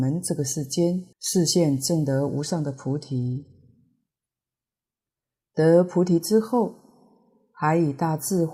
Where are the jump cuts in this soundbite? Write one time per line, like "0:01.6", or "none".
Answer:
0:01.1